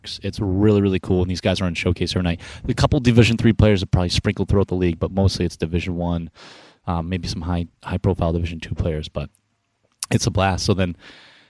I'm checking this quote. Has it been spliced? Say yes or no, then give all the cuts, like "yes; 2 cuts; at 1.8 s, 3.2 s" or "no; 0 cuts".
no; 0 cuts